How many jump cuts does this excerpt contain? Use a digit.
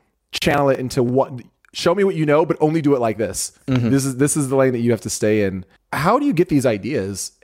0